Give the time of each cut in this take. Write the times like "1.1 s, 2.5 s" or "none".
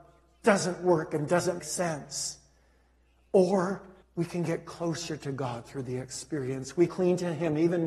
1.6 s, 4.0 s, 6.9 s